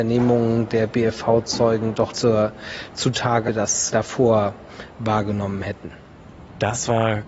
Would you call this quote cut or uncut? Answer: cut